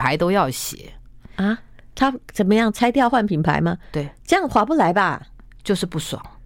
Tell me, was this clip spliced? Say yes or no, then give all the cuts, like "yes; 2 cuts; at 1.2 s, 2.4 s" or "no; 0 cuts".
no; 0 cuts